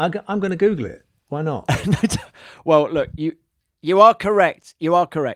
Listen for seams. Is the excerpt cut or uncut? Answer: uncut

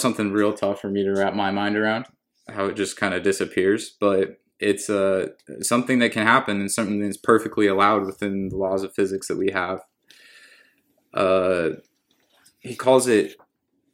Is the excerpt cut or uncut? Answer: cut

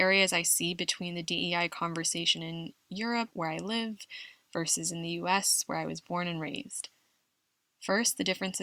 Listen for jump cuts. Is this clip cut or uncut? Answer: uncut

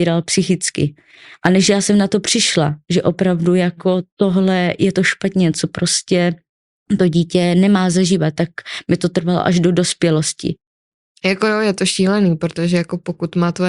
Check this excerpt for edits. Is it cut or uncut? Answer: uncut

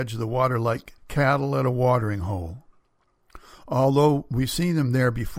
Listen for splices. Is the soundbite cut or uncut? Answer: cut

